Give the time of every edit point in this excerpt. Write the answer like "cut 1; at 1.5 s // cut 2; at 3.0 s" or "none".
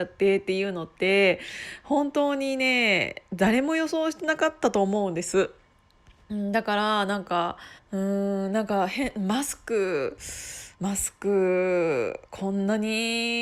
cut 1; at 7.8 s // cut 2; at 10.7 s // cut 3; at 12.3 s

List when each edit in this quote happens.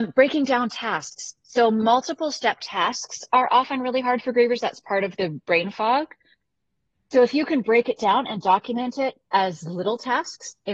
none

